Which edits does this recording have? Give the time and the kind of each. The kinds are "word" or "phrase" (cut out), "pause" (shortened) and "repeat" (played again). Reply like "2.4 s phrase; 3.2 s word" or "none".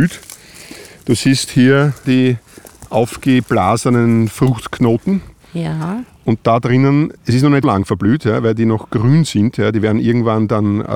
2.0 s word; 7.2 s pause; 7.6 s word